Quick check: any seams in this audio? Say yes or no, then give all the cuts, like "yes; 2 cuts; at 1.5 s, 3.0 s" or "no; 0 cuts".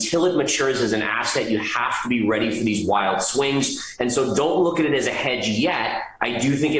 no; 0 cuts